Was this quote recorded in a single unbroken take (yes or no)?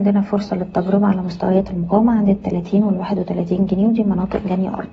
yes